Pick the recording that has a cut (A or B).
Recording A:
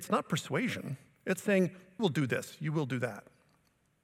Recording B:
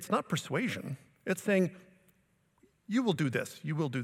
A